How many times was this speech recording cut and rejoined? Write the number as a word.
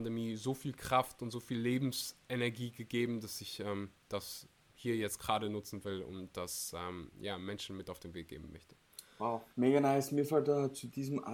one